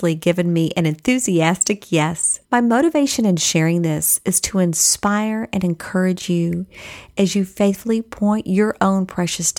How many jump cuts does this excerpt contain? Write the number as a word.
one